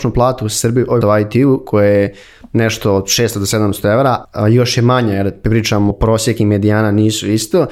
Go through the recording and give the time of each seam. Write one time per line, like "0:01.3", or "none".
0:01.0
0:04.2
0:05.9